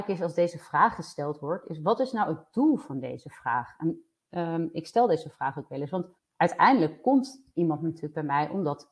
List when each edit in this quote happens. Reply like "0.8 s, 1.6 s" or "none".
6.2 s